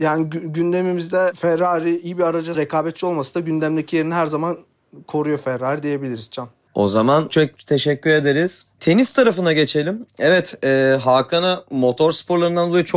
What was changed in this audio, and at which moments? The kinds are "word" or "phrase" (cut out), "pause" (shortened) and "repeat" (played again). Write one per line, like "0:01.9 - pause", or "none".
0:02.5 - phrase
0:07.3 - word